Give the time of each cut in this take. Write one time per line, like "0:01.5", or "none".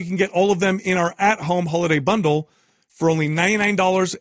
none